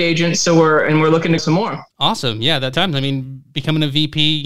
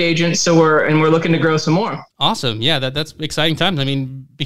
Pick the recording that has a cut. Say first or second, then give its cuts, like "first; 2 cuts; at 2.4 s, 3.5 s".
first; 2 cuts; at 1.4 s, 2.7 s